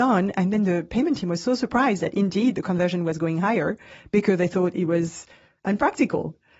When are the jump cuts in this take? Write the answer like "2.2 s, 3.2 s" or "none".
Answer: none